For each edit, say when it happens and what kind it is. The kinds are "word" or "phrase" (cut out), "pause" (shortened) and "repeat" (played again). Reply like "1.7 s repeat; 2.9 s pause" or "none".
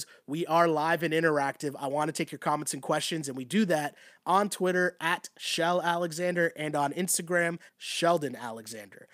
7.7 s word